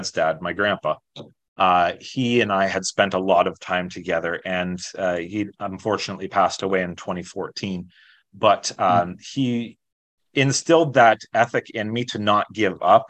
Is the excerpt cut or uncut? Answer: uncut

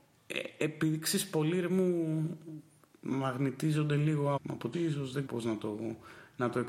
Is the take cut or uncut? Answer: cut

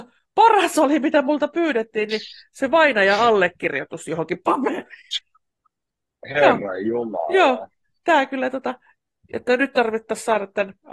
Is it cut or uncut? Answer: cut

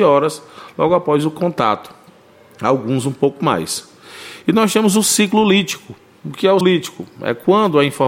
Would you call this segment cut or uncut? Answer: cut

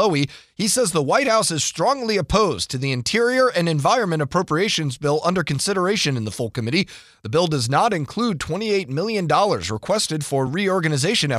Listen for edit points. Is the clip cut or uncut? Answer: uncut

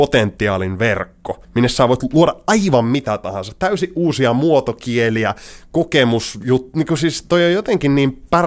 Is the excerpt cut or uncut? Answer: cut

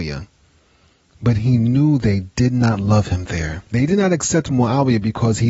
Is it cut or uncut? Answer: cut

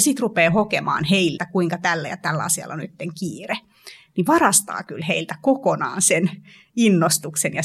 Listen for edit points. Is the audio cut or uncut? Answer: cut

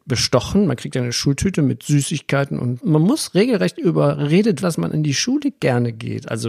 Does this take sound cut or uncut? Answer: cut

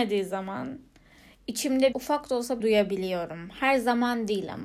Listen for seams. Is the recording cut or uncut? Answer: cut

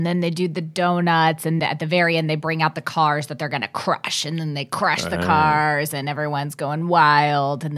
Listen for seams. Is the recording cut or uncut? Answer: cut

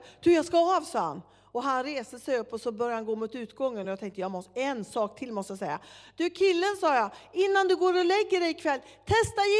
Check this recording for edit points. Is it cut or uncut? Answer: uncut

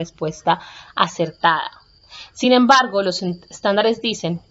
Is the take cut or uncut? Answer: uncut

